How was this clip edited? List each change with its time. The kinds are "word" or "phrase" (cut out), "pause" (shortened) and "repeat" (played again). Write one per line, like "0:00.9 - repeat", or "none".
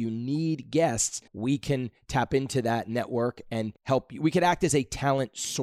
0:01.3 - pause
0:03.8 - pause